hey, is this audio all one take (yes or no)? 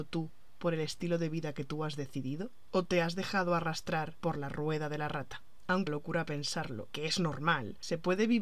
no